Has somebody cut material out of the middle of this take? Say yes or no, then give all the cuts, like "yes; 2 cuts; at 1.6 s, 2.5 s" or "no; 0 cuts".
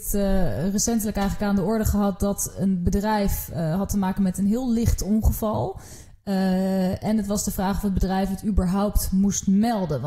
no; 0 cuts